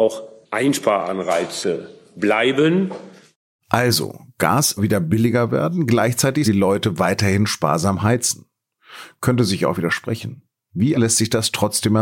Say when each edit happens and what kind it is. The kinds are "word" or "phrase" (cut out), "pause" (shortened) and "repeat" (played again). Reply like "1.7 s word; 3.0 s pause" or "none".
4.8 s word; 6.4 s word; 10.9 s word